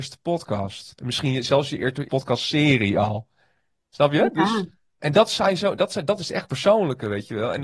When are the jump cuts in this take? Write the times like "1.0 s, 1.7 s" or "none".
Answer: 2.1 s, 5.0 s, 6.5 s